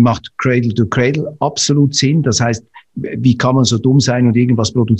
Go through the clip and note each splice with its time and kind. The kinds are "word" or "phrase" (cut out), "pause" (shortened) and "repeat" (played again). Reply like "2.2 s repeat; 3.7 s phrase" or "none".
none